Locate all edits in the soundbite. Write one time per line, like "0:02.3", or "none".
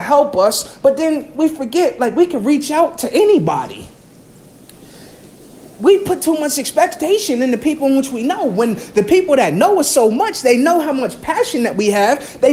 none